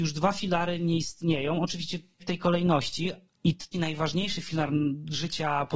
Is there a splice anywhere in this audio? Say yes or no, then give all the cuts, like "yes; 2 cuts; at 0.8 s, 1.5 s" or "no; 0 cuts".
yes; 2 cuts; at 2.2 s, 3.7 s